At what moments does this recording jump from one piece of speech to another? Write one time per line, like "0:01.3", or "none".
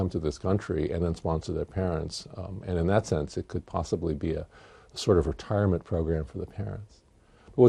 none